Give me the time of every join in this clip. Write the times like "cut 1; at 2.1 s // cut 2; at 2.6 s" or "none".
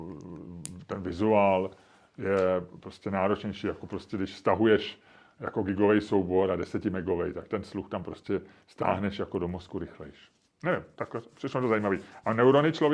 none